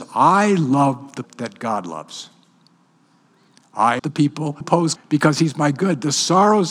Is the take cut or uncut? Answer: cut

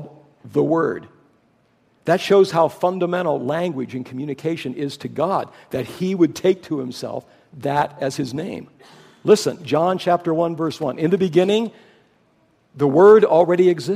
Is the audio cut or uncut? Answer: uncut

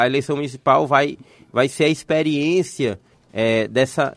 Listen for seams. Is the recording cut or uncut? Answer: uncut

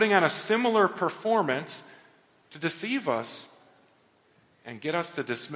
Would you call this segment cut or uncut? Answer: uncut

